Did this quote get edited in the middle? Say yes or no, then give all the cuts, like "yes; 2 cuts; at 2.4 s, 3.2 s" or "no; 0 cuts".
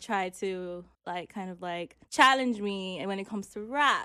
yes; 2 cuts; at 0.9 s, 2.0 s